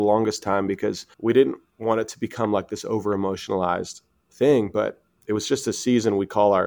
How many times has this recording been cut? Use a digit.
1